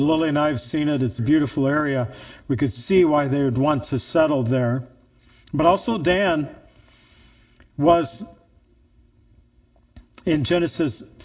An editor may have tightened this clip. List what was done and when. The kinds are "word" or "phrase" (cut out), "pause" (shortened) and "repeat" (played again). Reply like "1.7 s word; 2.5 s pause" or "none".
1.2 s word